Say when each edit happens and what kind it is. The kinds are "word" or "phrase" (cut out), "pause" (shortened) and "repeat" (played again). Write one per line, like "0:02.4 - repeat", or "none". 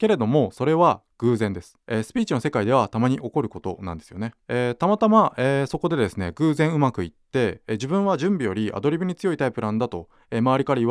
0:01.8 - pause
0:04.4 - pause